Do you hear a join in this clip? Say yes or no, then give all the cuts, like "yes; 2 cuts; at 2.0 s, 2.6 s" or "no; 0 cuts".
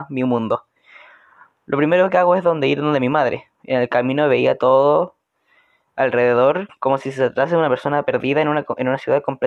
no; 0 cuts